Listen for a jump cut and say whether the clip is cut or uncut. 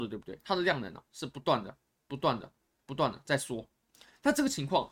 uncut